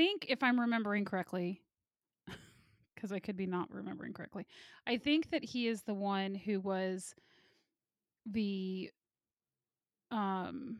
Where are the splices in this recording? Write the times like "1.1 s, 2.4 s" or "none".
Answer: none